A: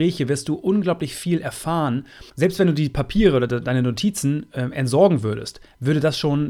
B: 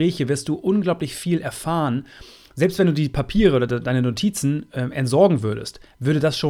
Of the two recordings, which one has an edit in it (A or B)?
A